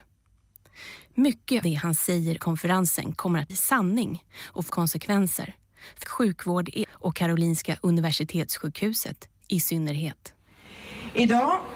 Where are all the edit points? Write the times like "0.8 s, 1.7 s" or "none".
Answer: 1.6 s, 2.4 s, 3.5 s, 4.7 s, 6.0 s, 6.8 s